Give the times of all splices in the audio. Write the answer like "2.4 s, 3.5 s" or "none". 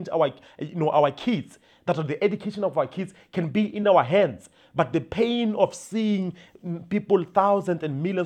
none